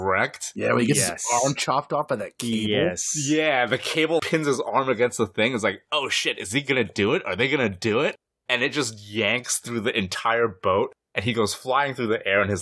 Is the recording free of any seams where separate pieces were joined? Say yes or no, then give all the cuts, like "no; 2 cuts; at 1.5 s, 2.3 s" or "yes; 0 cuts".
no; 1 cut; at 4.2 s